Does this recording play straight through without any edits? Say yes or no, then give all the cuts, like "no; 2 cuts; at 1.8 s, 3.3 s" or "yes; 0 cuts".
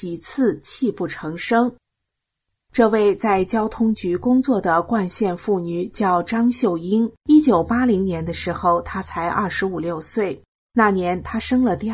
no; 2 cuts; at 7.2 s, 10.5 s